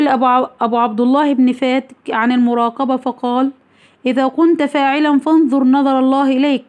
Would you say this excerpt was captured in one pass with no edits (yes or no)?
yes